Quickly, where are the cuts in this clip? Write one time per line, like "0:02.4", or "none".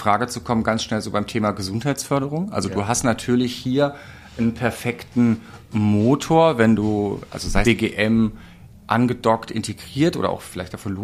0:07.6